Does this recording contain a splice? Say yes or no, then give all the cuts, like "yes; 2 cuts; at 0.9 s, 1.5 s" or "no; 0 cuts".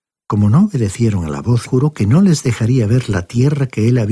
yes; 1 cut; at 1.7 s